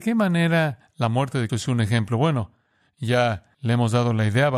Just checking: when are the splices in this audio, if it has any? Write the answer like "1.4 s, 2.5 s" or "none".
1.5 s, 3.5 s